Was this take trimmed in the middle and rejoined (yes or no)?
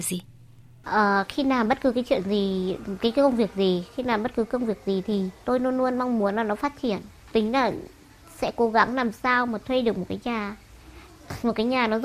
yes